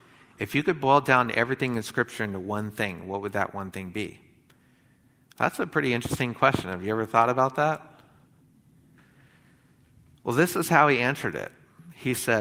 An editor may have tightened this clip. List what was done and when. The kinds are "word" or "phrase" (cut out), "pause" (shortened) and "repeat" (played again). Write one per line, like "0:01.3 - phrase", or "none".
none